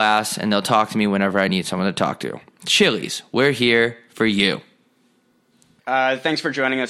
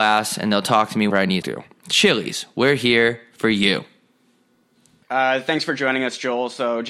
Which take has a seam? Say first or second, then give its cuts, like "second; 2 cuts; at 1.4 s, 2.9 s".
second; 2 cuts; at 1.1 s, 1.4 s